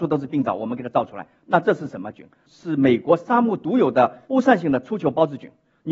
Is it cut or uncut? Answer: cut